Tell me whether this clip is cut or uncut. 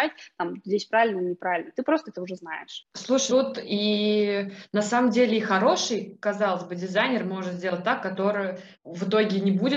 cut